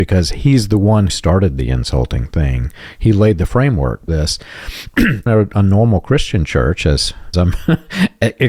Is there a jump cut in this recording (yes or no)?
yes